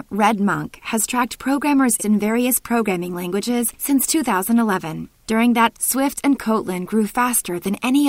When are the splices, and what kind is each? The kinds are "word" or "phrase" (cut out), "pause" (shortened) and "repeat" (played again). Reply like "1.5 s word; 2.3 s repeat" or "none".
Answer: 2.0 s word; 5.7 s word